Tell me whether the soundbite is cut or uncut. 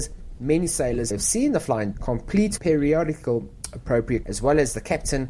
cut